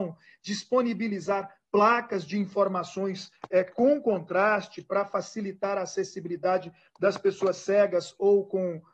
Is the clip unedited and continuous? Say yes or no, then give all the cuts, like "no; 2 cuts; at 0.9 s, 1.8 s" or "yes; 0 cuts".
yes; 0 cuts